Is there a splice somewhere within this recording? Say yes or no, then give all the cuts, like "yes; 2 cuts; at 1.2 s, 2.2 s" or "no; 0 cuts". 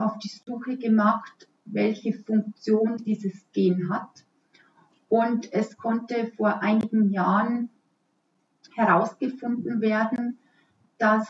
no; 0 cuts